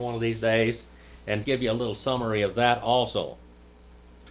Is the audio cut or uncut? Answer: cut